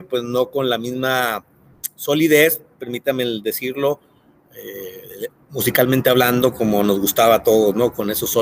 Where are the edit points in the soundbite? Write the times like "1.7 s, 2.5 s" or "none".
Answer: none